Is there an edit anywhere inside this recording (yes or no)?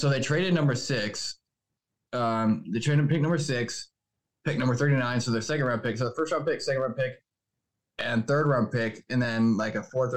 no